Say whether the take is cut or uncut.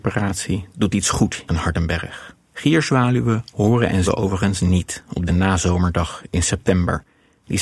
cut